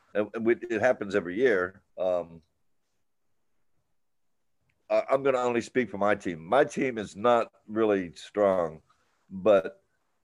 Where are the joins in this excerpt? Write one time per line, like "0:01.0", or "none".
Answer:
0:01.9